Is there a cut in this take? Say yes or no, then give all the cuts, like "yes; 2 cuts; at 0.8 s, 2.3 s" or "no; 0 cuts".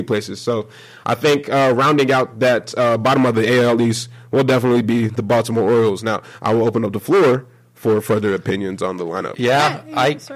no; 0 cuts